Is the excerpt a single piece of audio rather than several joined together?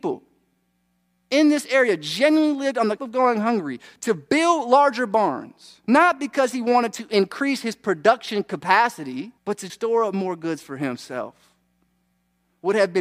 no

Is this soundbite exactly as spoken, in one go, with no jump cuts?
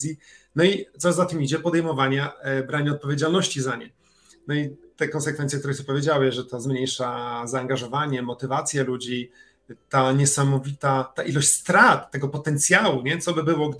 yes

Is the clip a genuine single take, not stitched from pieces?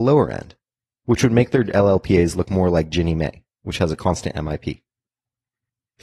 yes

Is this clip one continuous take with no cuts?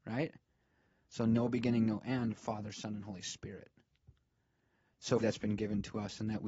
no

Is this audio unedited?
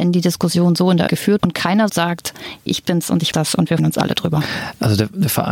no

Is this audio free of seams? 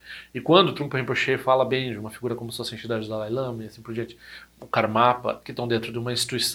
yes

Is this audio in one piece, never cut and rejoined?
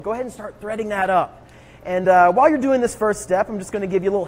yes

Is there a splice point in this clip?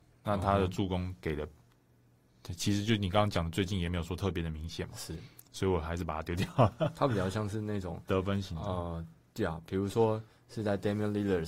no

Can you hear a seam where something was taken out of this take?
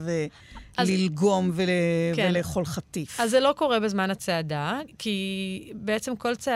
no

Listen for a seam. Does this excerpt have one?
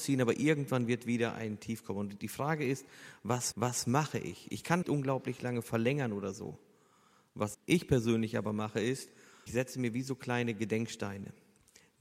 yes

